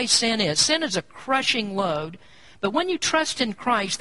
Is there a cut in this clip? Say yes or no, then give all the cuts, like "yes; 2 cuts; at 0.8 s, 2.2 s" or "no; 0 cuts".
no; 0 cuts